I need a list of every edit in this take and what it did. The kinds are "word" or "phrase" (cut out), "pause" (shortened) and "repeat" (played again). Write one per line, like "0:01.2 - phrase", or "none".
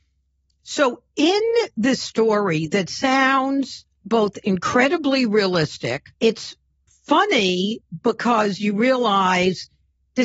0:03.9 - pause
0:06.1 - pause